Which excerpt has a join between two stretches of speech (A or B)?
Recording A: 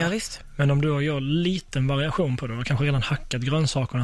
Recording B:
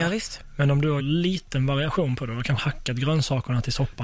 B